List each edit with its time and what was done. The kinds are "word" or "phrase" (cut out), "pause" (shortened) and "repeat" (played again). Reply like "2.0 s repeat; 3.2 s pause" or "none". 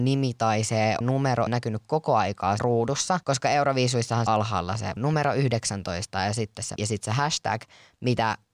1.0 s word; 1.5 s phrase; 2.6 s word; 3.2 s pause; 4.3 s phrase; 5.0 s word; 6.8 s phrase